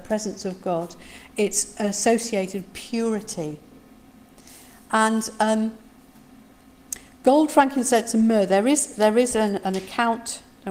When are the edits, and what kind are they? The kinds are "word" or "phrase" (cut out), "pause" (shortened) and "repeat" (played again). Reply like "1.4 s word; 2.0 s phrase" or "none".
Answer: 2.7 s word; 9.6 s word